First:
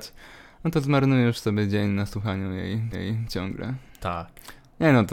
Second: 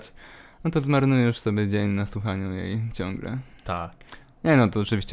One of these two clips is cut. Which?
first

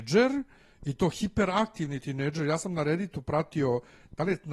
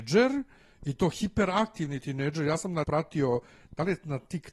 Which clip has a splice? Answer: second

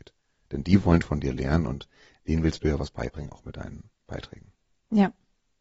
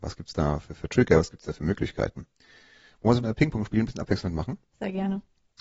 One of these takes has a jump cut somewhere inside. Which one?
second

